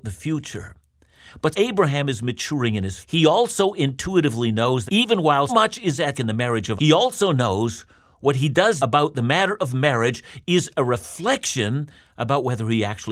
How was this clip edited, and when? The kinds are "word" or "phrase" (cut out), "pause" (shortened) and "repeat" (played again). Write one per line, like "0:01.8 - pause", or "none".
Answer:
0:01.5 - word
0:03.0 - word
0:04.9 - word
0:05.5 - word
0:06.1 - word
0:06.8 - word
0:08.8 - word